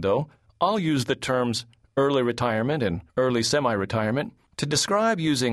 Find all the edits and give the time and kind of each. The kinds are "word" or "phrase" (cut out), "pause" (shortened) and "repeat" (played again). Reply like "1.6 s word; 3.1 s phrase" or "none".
3.1 s pause

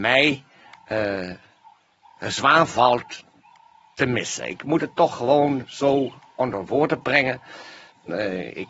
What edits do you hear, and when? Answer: none

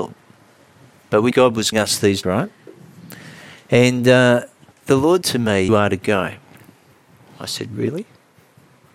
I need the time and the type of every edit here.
1.3 s word; 1.7 s word; 2.2 s word; 4.7 s pause; 5.2 s word; 5.7 s word; 6.9 s pause

